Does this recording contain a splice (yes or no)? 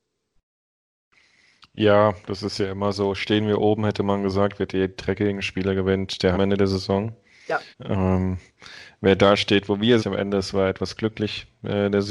yes